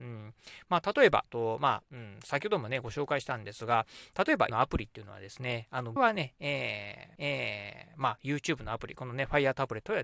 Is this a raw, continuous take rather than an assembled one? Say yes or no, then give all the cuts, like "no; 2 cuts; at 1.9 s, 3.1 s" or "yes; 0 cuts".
no; 4 cuts; at 1.2 s, 4.5 s, 6.0 s, 7.2 s